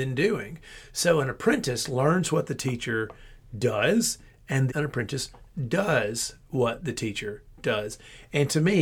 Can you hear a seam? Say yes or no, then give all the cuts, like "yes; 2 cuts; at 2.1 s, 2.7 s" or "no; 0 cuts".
yes; 1 cut; at 4.7 s